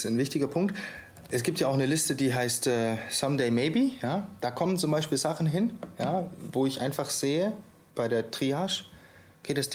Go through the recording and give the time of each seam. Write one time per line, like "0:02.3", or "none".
none